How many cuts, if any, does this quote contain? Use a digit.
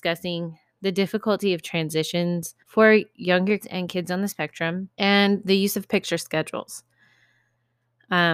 3